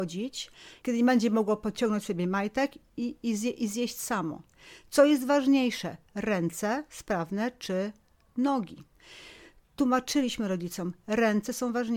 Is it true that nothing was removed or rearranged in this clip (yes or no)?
yes